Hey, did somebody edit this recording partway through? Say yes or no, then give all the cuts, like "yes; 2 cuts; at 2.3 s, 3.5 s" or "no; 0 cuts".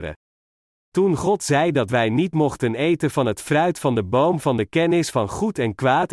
no; 0 cuts